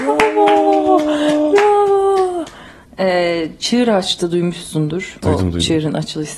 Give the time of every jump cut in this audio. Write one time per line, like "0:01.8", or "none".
none